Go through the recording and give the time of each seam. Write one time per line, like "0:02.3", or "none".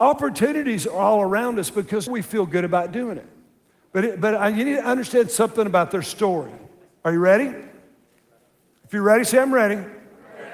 0:02.1